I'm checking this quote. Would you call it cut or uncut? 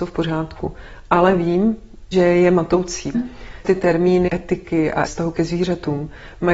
cut